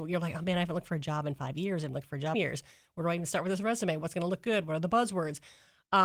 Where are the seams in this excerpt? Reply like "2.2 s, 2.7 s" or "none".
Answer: 2.3 s